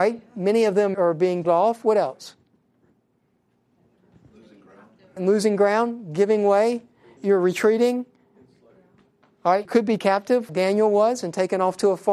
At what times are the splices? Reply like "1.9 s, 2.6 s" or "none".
0.9 s, 1.4 s, 5.2 s, 7.2 s, 9.6 s, 10.0 s, 10.5 s